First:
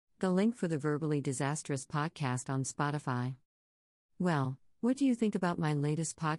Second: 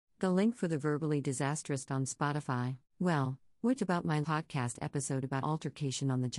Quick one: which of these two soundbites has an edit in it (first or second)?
second